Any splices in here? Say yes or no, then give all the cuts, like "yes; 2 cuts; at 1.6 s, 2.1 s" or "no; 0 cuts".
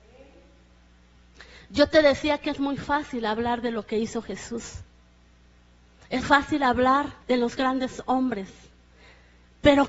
yes; 2 cuts; at 6.2 s, 7.2 s